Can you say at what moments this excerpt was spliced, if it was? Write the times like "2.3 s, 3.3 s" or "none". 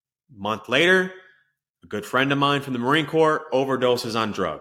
none